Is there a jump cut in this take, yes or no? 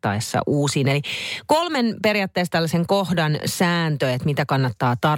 no